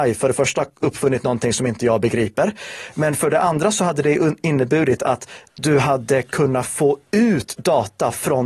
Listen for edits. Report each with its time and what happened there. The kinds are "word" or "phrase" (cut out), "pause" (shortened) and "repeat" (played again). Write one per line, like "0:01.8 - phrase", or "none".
none